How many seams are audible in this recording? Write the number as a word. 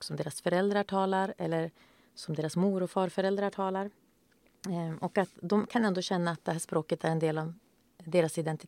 zero